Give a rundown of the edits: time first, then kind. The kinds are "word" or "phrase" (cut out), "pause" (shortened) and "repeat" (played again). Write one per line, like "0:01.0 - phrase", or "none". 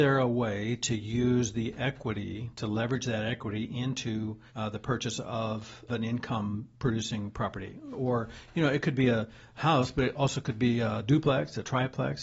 0:04.5 - pause
0:05.9 - word
0:07.9 - word